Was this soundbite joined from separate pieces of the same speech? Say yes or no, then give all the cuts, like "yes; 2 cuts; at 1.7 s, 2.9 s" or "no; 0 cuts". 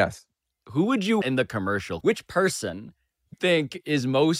yes; 3 cuts; at 1.2 s, 2.0 s, 3.3 s